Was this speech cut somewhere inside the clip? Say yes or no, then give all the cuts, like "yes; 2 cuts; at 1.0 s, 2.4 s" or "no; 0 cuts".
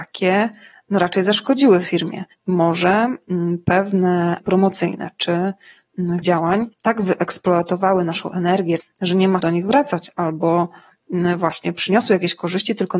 yes; 6 cuts; at 2.3 s, 4.4 s, 6.2 s, 6.7 s, 8.8 s, 9.4 s